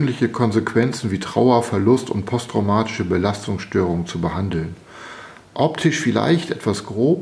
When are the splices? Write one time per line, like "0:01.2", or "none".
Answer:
none